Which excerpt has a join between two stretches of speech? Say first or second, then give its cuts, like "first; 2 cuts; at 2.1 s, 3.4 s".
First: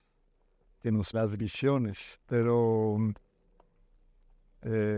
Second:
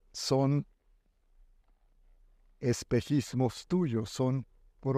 first; 2 cuts; at 1.1 s, 2.2 s